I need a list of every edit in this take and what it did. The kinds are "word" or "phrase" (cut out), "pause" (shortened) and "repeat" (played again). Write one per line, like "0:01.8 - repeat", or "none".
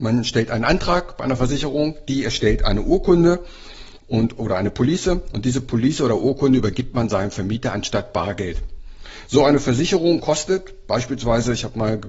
none